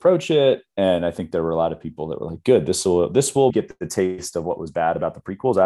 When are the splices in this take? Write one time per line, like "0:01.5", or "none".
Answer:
0:03.5